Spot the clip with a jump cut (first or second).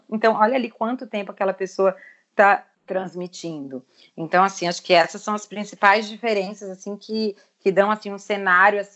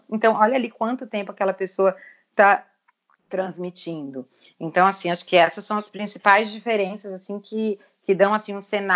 first